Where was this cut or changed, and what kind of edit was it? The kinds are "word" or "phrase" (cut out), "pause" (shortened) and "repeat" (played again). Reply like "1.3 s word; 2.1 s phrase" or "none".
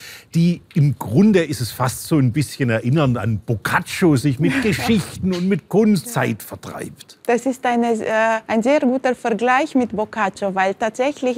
6.0 s phrase; 7.2 s pause; 8.4 s pause